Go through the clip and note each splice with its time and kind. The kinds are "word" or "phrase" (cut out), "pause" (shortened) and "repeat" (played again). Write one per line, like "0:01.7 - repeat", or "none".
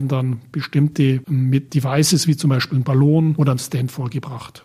none